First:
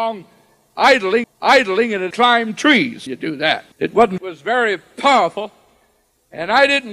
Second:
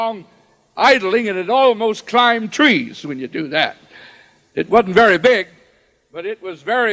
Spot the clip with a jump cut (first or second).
first